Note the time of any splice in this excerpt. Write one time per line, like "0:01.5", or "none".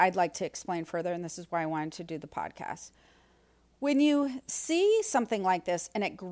none